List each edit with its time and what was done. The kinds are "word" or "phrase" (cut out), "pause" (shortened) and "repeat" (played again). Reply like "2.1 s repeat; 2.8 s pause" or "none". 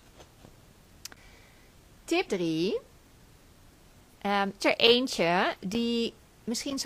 2.3 s word; 4.6 s word